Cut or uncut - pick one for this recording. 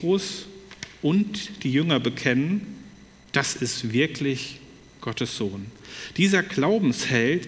uncut